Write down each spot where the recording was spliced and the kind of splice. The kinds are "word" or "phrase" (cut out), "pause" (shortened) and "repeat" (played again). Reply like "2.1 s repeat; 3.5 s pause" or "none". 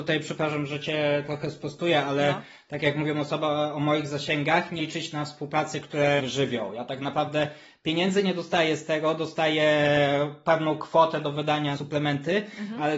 4.8 s word; 6.2 s phrase; 11.7 s word